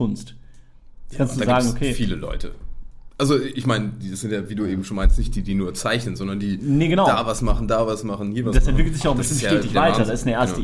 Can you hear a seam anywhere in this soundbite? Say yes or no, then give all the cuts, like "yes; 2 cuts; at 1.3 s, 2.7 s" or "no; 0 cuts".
no; 0 cuts